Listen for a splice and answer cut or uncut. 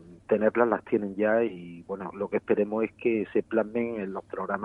uncut